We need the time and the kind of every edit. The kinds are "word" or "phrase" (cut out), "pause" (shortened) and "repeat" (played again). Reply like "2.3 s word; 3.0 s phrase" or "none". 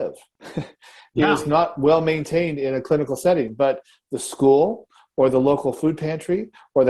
none